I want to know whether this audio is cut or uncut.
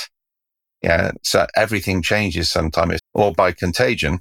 cut